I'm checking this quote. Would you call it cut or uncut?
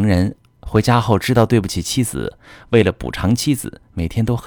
uncut